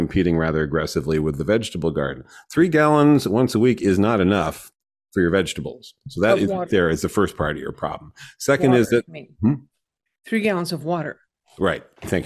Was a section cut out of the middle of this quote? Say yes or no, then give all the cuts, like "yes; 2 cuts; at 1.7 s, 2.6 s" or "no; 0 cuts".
yes; 1 cut; at 6.7 s